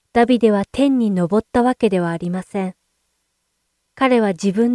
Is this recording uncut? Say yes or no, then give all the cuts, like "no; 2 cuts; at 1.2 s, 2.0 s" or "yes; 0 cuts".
yes; 0 cuts